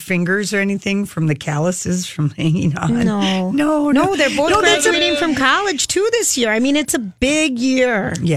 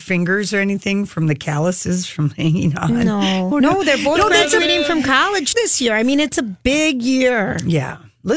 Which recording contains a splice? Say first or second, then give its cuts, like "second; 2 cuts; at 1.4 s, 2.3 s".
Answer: second; 2 cuts; at 3.5 s, 5.5 s